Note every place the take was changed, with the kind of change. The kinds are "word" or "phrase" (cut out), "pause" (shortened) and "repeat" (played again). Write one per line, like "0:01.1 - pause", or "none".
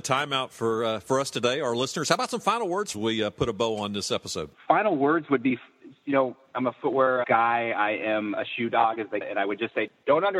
0:02.9 - phrase
0:04.5 - pause
0:07.2 - word
0:09.2 - word